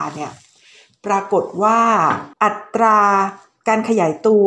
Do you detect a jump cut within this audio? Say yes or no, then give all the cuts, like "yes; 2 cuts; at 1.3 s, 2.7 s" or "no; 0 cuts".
yes; 1 cut; at 2.3 s